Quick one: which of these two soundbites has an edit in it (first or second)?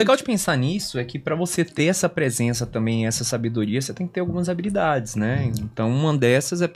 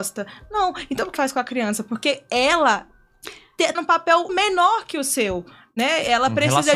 second